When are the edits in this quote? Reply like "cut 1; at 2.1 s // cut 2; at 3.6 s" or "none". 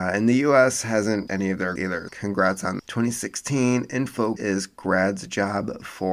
cut 1; at 1.3 s // cut 2; at 1.8 s // cut 3; at 2.1 s // cut 4; at 2.8 s // cut 5; at 4.4 s